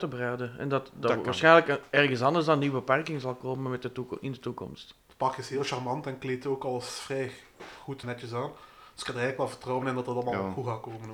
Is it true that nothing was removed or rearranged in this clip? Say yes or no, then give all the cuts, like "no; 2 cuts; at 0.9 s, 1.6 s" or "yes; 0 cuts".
no; 1 cut; at 8.0 s